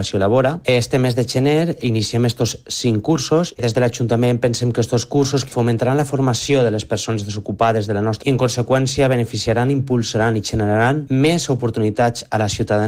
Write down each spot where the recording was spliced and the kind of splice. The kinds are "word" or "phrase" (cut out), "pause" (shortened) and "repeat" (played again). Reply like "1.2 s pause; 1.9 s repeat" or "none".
8.2 s word